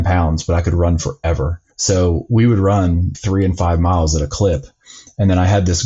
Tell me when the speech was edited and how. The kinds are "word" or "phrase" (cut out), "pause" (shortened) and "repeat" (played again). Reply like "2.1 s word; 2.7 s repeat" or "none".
1.7 s pause; 3.1 s word